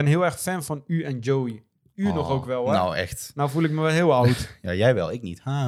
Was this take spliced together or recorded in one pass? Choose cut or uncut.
uncut